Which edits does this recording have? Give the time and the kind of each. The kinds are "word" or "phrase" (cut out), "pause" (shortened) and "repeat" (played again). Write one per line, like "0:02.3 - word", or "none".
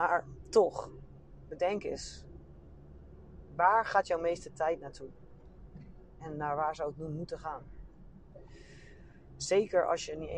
none